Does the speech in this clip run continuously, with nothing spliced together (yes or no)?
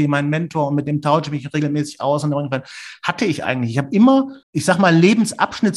no